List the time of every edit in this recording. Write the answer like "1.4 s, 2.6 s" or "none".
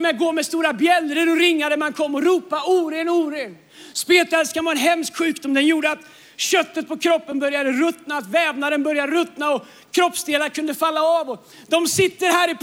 none